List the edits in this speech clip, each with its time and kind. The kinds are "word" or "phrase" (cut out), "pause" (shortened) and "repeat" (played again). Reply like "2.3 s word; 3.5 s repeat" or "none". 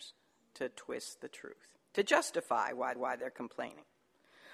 1.9 s pause; 3.0 s repeat